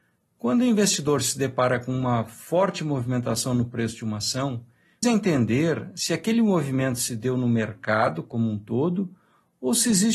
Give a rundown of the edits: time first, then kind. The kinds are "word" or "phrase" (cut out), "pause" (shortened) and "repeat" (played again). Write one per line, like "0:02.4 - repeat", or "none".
0:05.0 - word